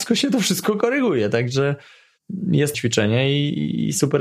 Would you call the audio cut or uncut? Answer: cut